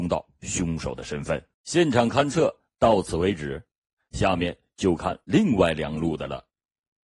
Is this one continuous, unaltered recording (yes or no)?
no